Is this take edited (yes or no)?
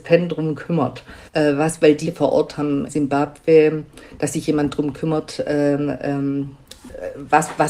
yes